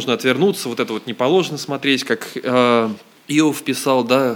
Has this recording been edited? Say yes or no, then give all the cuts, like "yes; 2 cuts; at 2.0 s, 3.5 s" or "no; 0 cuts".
yes; 1 cut; at 3.1 s